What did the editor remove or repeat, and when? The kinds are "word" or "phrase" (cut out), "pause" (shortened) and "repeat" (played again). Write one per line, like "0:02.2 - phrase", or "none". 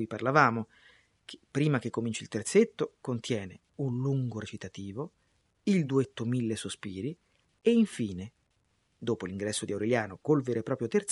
none